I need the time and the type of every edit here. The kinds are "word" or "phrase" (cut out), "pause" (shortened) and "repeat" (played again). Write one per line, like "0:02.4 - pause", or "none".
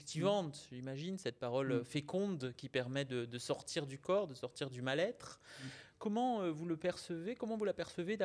none